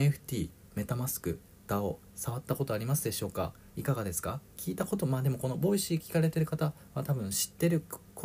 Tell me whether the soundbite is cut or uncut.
cut